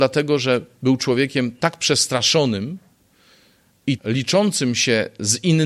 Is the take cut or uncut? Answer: cut